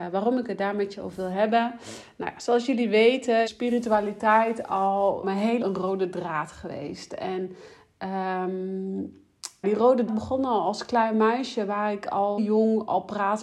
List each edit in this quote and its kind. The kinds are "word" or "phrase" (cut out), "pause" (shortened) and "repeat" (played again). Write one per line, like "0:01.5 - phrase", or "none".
0:03.5 - word
0:05.2 - word
0:05.6 - word
0:09.6 - word
0:10.1 - word
0:12.4 - word